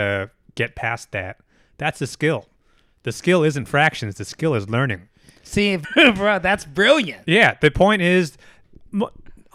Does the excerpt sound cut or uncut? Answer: cut